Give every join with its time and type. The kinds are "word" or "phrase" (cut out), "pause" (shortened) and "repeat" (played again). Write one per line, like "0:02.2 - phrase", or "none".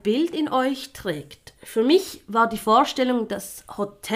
none